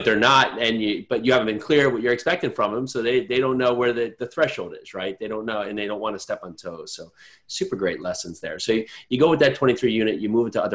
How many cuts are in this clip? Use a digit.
0